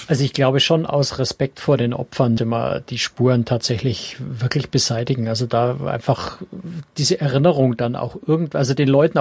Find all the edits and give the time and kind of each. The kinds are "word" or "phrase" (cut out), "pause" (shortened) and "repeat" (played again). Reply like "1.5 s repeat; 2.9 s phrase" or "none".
2.4 s word